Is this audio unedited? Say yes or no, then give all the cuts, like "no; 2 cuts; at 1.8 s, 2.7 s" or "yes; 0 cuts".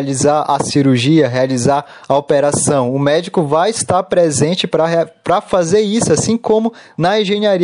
yes; 0 cuts